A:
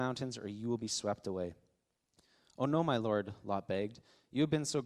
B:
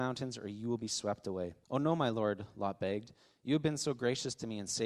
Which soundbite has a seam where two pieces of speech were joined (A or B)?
B